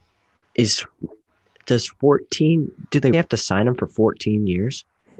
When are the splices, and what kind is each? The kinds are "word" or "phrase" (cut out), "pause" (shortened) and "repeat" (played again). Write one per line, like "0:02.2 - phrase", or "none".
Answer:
0:03.1 - word